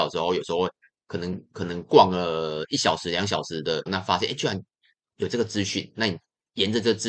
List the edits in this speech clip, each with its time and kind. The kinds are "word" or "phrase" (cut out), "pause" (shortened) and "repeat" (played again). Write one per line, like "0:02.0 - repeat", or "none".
0:03.9 - word